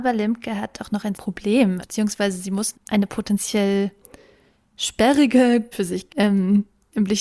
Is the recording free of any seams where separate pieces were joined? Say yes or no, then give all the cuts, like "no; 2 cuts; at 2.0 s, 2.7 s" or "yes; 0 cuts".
no; 5 cuts; at 1.1 s, 1.8 s, 2.7 s, 5.7 s, 6.1 s